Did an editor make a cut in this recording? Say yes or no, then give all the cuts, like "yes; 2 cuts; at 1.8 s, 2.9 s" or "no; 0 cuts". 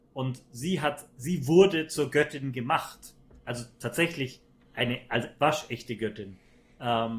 no; 0 cuts